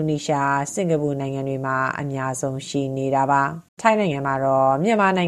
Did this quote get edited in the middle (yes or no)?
yes